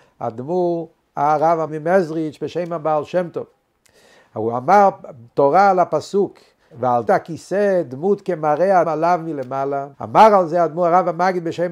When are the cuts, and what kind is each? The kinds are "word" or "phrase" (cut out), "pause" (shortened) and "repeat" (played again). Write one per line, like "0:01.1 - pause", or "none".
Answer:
0:01.7 - word
0:06.7 - word
0:07.1 - word
0:08.8 - word
0:09.9 - pause